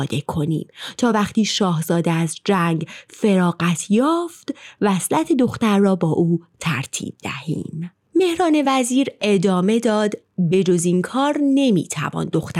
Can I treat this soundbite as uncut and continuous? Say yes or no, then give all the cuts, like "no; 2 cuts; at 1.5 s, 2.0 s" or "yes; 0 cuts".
yes; 0 cuts